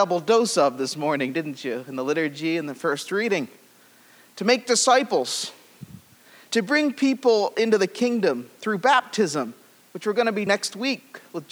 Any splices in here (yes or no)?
yes